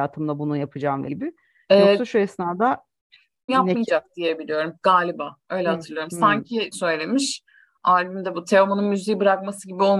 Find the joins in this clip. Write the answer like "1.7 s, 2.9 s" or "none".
1.1 s, 3.5 s, 6.7 s